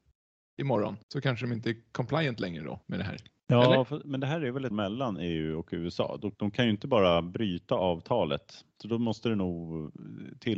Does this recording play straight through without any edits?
no; 6 cuts; at 1.0 s, 2.8 s, 3.3 s, 4.7 s, 6.3 s, 8.7 s

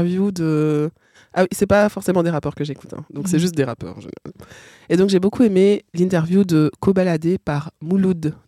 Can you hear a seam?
no; 0 cuts

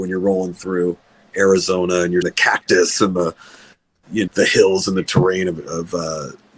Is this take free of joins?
no; 2 cuts; at 2.2 s, 4.3 s

